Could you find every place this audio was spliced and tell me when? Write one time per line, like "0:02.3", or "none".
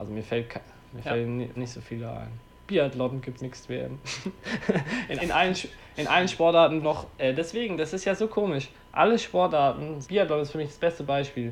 0:01.6
0:03.4
0:05.2
0:06.8
0:10.0